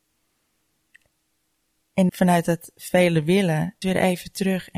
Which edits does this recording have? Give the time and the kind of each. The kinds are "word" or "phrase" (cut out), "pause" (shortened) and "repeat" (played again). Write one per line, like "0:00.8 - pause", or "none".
0:02.1 - word
0:03.8 - word